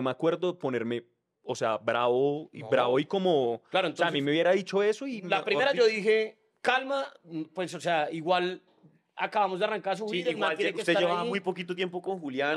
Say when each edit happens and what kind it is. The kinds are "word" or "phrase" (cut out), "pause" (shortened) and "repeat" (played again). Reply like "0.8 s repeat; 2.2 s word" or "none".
none